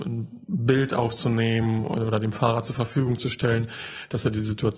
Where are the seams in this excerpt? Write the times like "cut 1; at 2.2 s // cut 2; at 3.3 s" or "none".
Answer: none

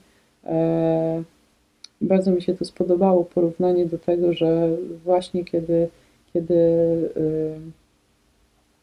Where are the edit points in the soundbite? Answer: none

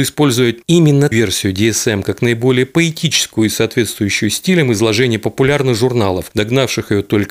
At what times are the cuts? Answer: cut 1; at 1.1 s

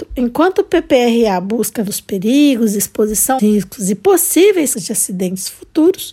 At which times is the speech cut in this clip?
cut 1; at 1.9 s // cut 2; at 3.4 s // cut 3; at 4.7 s

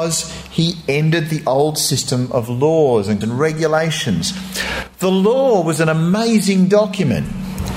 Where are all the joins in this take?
cut 1; at 3.2 s

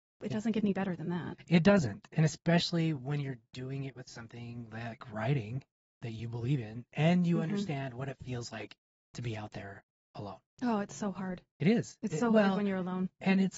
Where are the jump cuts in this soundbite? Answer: none

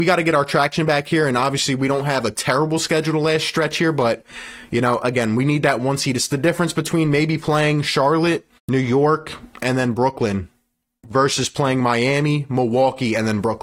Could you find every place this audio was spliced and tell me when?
cut 1; at 8.5 s

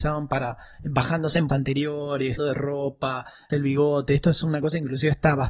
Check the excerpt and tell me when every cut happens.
cut 1; at 1.5 s // cut 2; at 2.4 s // cut 3; at 3.5 s

